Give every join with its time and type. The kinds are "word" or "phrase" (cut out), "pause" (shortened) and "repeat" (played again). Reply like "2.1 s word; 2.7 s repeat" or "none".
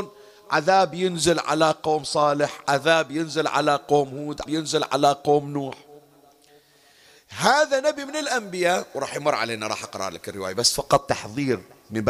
4.5 s word